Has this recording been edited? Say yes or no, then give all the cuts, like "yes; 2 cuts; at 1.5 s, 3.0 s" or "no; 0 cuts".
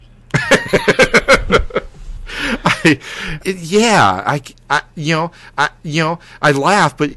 yes; 2 cuts; at 3.4 s, 5.5 s